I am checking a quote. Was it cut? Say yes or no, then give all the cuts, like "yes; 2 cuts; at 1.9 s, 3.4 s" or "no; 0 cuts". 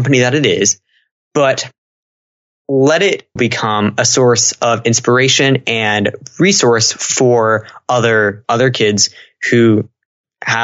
yes; 2 cuts; at 3.4 s, 8.4 s